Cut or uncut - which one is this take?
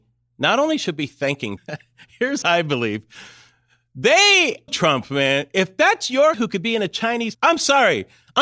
cut